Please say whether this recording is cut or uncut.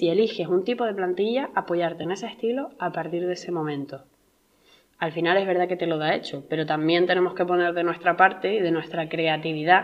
uncut